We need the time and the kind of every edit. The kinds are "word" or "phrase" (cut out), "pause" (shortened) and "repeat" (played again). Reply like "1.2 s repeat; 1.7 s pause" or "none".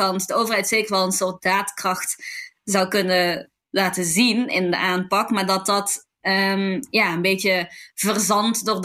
none